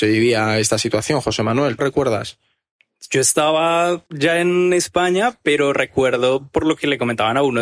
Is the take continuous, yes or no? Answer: no